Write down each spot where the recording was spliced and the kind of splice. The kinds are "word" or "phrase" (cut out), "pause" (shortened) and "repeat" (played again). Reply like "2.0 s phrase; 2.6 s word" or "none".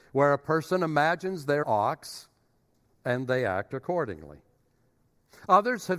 1.6 s word